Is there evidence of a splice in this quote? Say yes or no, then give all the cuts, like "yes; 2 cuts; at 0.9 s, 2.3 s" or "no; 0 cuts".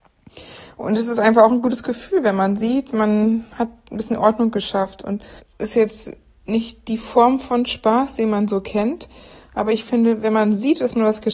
yes; 1 cut; at 5.4 s